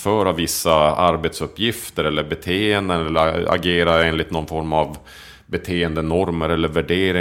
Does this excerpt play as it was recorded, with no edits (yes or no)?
yes